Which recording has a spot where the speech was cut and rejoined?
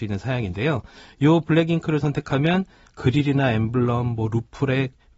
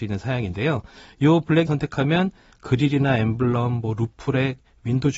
second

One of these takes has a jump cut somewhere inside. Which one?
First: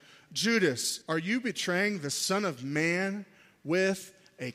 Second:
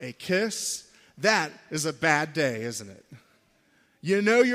first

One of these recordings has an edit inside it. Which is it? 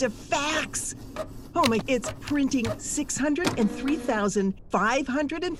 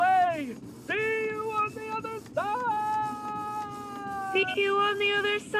first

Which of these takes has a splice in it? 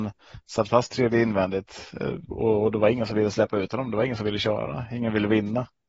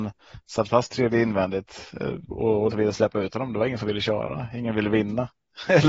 second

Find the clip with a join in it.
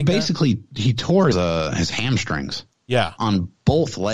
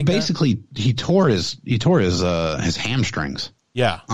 first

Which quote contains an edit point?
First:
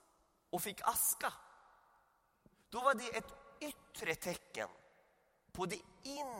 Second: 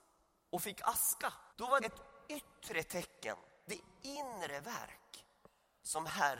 second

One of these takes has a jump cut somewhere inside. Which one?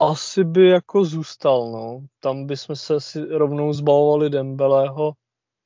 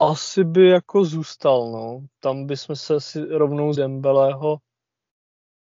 second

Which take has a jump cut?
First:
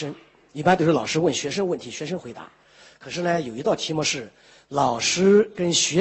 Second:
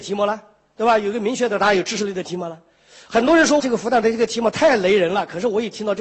second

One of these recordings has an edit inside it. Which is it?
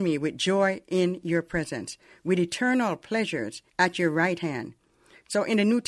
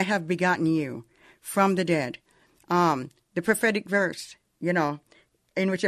first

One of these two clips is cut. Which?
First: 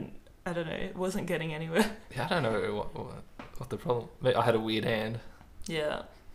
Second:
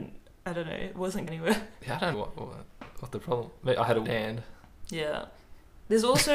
second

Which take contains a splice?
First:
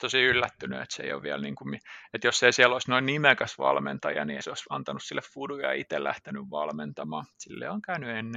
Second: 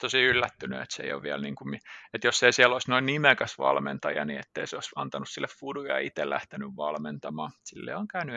first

